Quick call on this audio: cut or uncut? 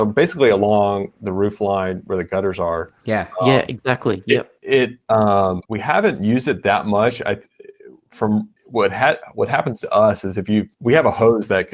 cut